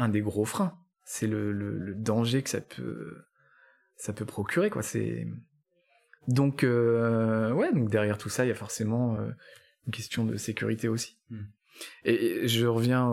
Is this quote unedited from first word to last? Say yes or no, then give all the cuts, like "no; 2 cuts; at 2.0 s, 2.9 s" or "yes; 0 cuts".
yes; 0 cuts